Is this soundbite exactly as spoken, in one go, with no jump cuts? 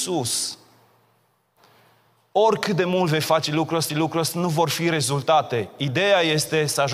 no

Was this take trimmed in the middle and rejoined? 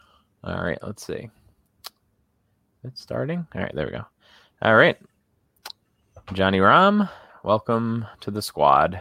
no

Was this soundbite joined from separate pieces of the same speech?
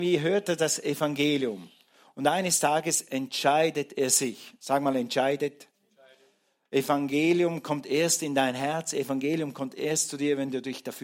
no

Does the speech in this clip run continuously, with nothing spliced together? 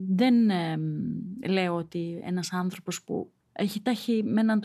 no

